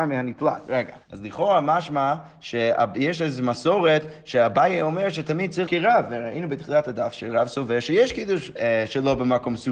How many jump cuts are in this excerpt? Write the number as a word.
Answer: three